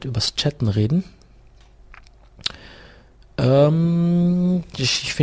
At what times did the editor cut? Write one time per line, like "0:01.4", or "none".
none